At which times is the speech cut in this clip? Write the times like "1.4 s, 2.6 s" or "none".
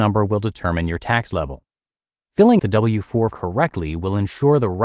2.6 s, 3.3 s